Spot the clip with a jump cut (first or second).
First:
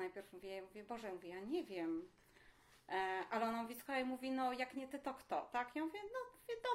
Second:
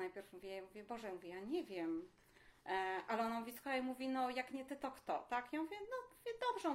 second